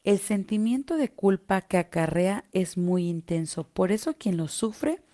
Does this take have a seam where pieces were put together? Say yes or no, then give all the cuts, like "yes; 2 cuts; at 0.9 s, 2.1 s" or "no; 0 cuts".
no; 0 cuts